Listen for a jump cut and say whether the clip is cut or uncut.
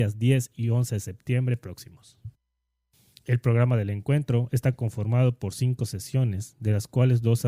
uncut